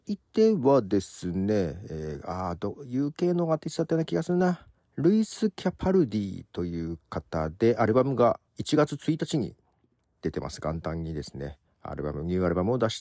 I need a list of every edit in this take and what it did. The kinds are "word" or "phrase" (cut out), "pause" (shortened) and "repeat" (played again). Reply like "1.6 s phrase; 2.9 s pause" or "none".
8.5 s pause